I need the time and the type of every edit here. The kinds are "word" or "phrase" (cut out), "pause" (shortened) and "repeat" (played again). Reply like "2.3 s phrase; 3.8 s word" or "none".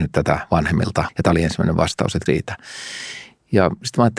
1.1 s word; 2.3 s word